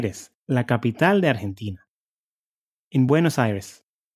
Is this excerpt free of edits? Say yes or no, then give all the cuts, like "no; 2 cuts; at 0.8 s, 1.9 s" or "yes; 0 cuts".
yes; 0 cuts